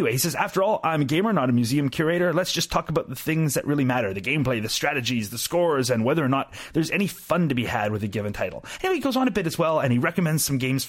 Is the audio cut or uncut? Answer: uncut